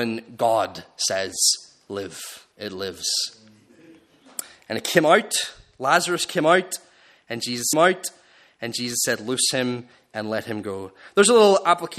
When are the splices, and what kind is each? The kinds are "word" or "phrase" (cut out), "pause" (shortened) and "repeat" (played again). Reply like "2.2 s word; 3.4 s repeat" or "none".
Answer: 2.5 s pause; 7.7 s repeat

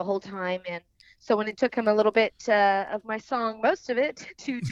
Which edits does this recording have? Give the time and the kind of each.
none

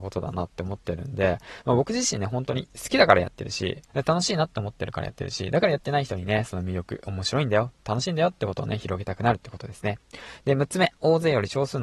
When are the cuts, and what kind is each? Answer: 3.9 s pause

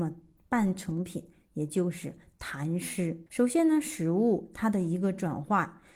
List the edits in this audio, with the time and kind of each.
3.3 s pause

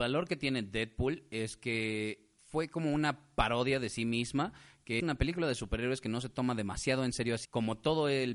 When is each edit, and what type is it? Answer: 2.4 s pause; 5.0 s word; 7.4 s word

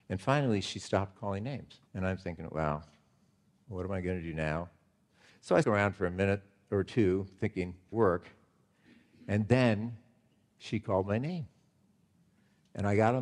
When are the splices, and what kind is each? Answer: 1.9 s pause; 5.6 s word; 7.9 s phrase

